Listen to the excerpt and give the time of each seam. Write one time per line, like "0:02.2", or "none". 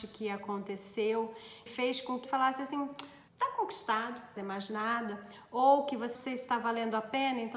0:01.7
0:02.2
0:03.3
0:04.4
0:06.1